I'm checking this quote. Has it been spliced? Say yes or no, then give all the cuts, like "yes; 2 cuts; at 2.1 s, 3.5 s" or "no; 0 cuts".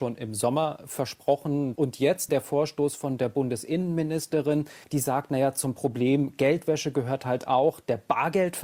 yes; 2 cuts; at 2.3 s, 4.8 s